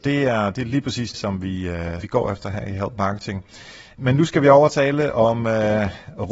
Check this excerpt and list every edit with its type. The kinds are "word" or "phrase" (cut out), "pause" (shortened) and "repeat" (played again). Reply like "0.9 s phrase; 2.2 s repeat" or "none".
1.1 s word; 2.0 s word